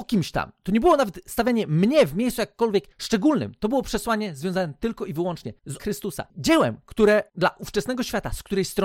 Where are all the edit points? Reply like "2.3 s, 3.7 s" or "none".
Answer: 5.8 s